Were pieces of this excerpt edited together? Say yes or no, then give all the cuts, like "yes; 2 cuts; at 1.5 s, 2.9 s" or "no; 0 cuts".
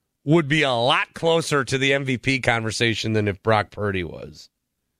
no; 0 cuts